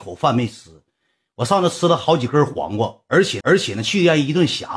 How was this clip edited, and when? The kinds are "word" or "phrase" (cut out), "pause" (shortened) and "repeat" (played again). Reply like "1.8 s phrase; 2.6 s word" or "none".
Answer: 3.4 s repeat